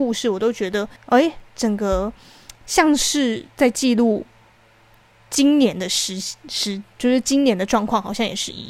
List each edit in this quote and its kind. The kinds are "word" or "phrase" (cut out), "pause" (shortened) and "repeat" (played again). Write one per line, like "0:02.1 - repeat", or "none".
0:01.0 - pause